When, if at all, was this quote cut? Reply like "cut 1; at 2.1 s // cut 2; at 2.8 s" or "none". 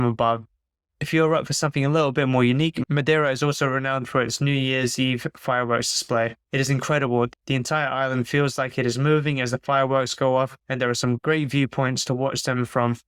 cut 1; at 10.6 s